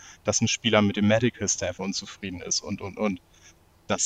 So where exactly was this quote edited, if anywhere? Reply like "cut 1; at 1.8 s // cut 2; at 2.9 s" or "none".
none

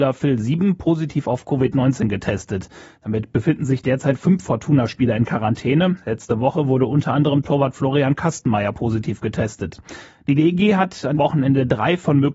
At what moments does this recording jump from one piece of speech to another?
cut 1; at 11.2 s

